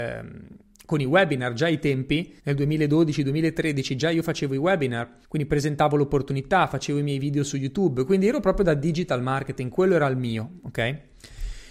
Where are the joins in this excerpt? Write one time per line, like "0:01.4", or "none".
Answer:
0:02.4
0:05.2

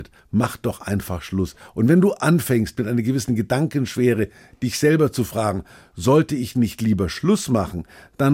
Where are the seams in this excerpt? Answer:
none

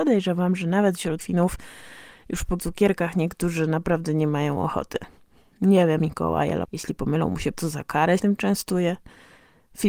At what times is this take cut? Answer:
0:01.2
0:02.6
0:06.0
0:06.6
0:07.5
0:08.2

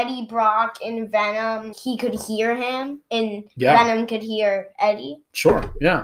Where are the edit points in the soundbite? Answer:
0:01.7

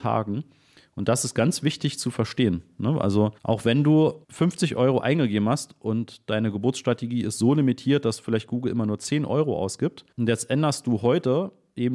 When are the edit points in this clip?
0:03.4
0:04.2
0:10.1

